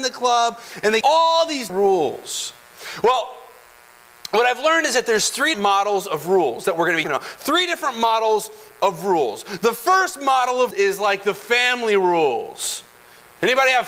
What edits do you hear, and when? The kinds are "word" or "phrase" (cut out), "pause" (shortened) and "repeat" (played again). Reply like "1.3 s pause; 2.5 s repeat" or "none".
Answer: 1.0 s word; 1.7 s word; 5.5 s word; 7.0 s word; 10.7 s word